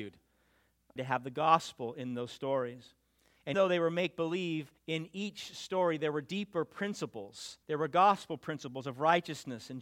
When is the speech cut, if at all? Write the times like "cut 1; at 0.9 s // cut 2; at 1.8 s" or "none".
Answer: cut 1; at 1.0 s // cut 2; at 3.5 s // cut 3; at 4.8 s // cut 4; at 7.6 s

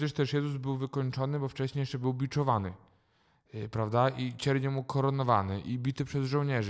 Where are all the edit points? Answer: none

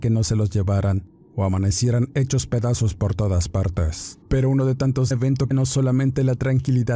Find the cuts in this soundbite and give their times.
cut 1; at 1.2 s // cut 2; at 4.3 s // cut 3; at 5.1 s // cut 4; at 5.5 s

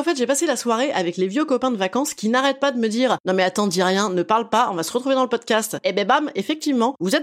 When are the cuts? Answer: none

